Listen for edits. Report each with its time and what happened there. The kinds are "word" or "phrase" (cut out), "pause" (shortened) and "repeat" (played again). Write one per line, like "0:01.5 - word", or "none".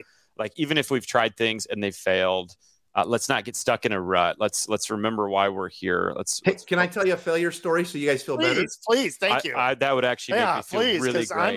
none